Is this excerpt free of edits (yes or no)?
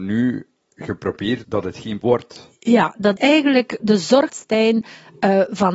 no